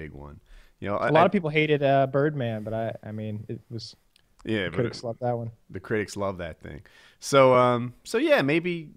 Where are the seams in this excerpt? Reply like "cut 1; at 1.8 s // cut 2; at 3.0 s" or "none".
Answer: none